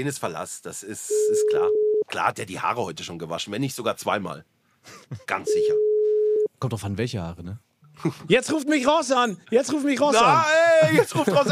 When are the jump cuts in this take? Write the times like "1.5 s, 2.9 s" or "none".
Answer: 5.2 s, 6.5 s, 9.4 s

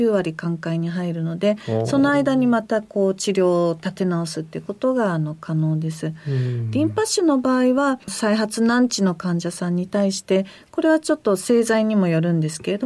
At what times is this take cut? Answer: 8.0 s

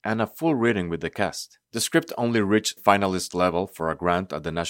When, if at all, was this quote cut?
1.6 s, 2.8 s

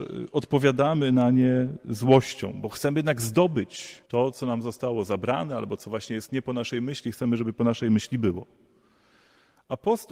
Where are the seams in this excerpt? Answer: 4.1 s

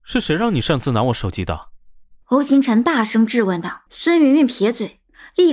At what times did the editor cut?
2.2 s, 3.9 s

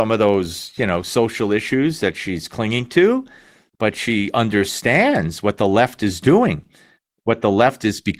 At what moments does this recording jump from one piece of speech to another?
none

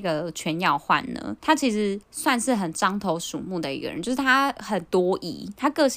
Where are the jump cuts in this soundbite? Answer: 1.4 s, 2.0 s

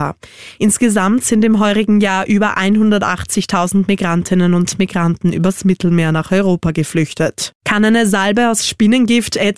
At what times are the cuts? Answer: 7.6 s

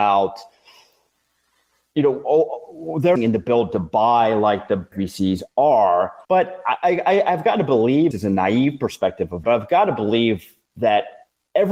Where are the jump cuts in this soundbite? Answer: 3.2 s, 4.9 s, 6.2 s, 8.1 s, 9.4 s

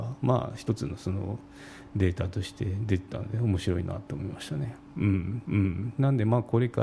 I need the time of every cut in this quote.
5.4 s

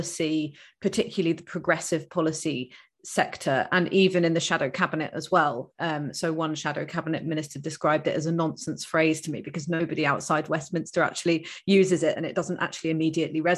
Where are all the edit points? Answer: none

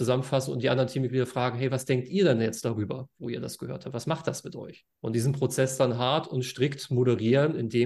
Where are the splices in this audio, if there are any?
4.9 s

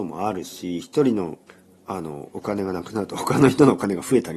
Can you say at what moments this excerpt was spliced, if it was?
1.5 s

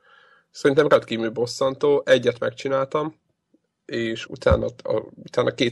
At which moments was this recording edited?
4.3 s

